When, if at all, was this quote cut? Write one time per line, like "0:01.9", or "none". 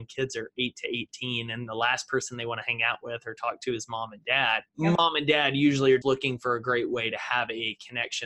0:04.7
0:06.0